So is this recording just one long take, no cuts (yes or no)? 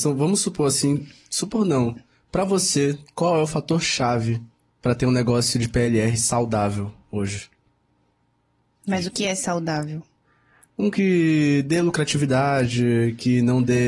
yes